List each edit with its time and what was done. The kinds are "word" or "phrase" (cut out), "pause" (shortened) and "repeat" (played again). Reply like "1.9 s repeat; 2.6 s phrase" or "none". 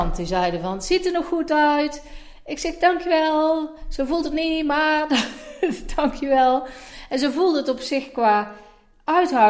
none

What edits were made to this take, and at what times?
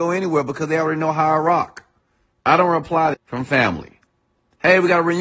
3.1 s phrase

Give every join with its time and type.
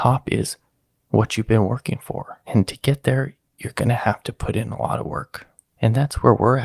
none

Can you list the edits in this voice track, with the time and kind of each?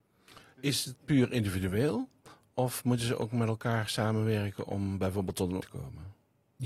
1.0 s word; 5.6 s word

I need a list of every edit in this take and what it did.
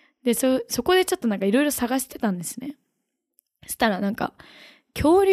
none

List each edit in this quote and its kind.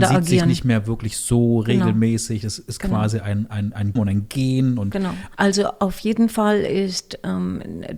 4.0 s phrase

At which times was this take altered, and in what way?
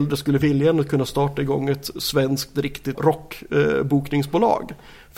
2.9 s word

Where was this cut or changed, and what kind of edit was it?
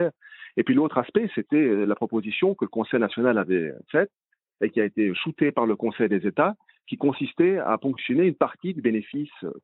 none

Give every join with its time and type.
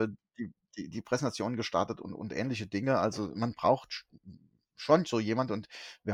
none

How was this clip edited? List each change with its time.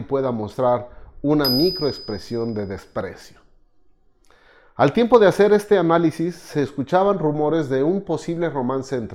none

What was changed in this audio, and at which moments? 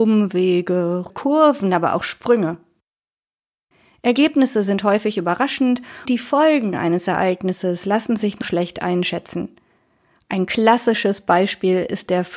1.1 s word; 6.1 s word; 8.4 s word

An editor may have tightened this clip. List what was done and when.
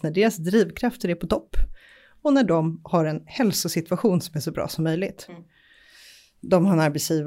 none

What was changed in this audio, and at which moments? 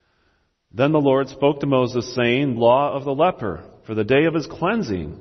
2.6 s phrase

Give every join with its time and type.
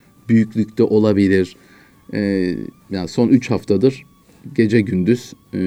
none

